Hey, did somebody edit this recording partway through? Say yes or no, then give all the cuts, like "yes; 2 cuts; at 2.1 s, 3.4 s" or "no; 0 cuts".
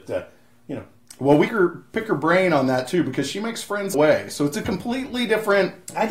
yes; 2 cuts; at 1.5 s, 3.9 s